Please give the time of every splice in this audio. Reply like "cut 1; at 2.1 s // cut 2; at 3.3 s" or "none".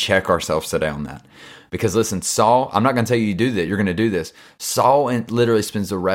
none